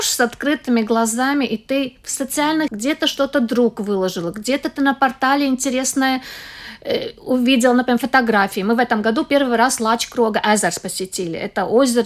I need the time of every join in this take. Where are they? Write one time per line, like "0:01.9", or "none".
0:02.7